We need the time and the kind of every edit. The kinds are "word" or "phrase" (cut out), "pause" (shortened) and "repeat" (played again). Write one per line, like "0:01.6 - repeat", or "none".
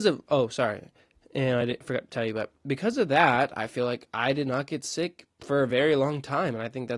none